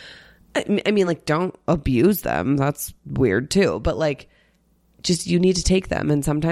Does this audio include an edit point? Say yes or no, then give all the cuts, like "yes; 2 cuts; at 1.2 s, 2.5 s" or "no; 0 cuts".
no; 0 cuts